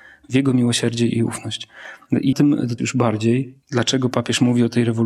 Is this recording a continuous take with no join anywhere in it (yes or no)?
no